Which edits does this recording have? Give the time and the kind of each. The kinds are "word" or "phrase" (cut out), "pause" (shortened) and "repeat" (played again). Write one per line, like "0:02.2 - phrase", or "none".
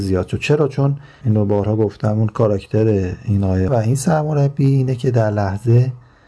0:01.2 - word
0:03.7 - word